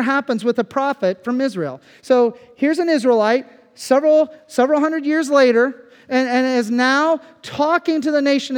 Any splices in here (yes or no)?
no